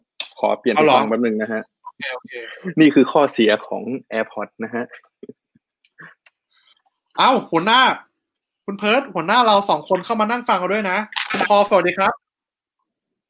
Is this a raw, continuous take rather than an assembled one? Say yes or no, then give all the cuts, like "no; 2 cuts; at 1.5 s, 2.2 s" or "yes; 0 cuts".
yes; 0 cuts